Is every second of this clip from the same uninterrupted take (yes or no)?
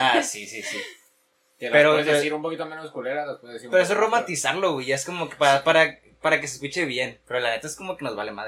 yes